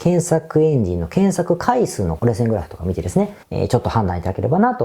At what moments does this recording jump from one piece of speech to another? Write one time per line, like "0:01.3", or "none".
0:03.4